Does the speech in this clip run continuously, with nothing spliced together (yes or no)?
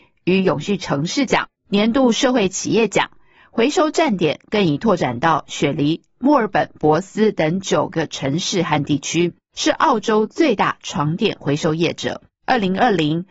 yes